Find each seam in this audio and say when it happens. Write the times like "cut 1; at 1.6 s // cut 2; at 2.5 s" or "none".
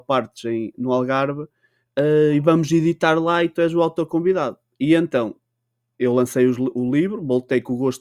none